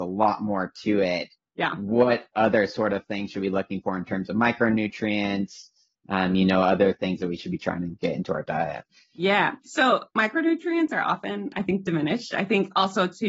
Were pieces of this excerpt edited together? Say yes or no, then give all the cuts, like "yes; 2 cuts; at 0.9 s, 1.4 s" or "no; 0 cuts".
no; 0 cuts